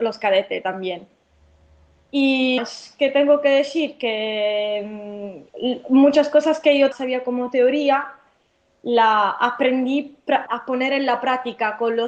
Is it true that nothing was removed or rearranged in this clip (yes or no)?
no